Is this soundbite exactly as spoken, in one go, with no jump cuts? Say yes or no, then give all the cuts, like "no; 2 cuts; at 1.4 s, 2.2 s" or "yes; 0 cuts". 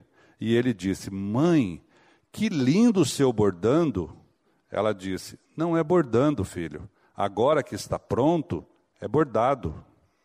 yes; 0 cuts